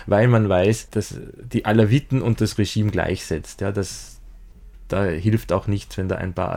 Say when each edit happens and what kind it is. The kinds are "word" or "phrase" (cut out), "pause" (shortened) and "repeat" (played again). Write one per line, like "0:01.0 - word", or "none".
none